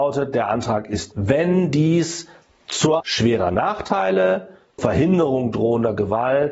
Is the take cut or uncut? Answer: cut